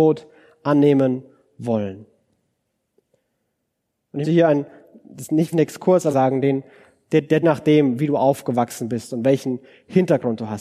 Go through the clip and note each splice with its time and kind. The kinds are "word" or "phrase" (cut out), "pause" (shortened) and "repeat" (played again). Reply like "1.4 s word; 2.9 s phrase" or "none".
4.2 s word; 5.5 s word; 6.1 s phrase; 7.4 s phrase